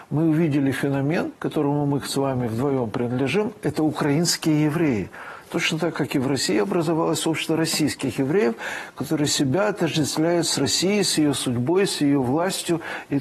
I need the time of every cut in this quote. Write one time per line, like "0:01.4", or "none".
0:01.4